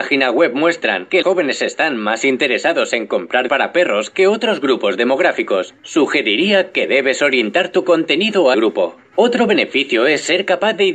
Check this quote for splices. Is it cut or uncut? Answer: cut